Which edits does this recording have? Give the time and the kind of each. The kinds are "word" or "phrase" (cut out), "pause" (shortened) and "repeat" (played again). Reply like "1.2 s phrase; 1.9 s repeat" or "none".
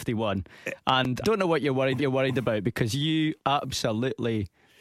1.2 s word; 2.0 s repeat; 3.4 s word

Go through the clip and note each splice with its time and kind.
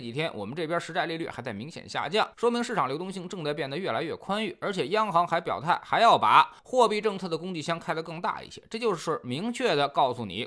2.3 s pause; 6.6 s pause

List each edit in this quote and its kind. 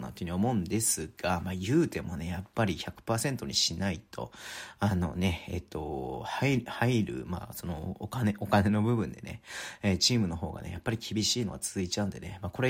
none

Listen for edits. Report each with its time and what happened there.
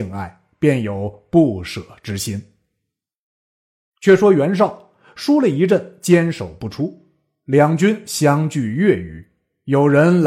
none

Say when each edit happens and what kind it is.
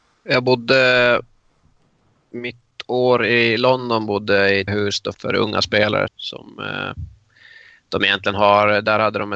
4.7 s word; 5.1 s word; 6.1 s word

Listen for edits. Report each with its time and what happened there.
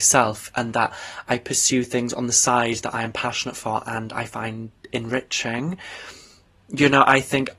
none

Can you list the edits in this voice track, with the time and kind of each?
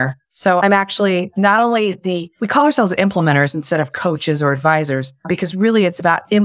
none

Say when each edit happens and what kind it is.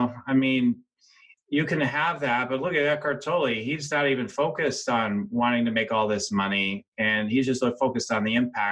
none

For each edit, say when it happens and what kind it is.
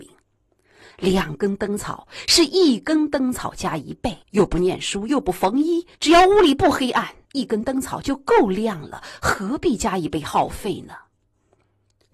4.2 s pause; 5.9 s pause; 7.2 s pause

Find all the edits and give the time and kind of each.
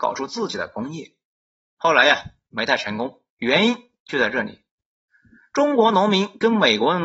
none

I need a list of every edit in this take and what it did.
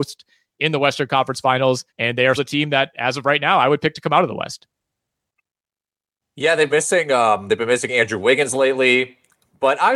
1.9 s pause; 2.4 s word; 6.7 s word

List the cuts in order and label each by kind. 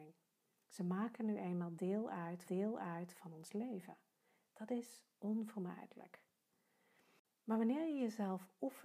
2.5 s repeat

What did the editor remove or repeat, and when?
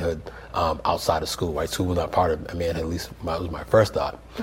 none

